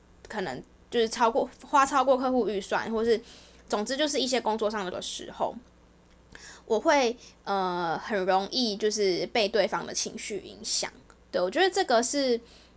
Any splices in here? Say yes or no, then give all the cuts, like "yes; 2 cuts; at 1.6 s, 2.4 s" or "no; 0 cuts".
yes; 2 cuts; at 4.9 s, 11.1 s